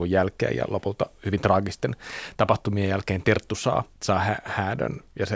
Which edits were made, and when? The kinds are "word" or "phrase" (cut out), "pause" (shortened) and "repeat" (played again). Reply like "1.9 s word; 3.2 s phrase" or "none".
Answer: 3.9 s pause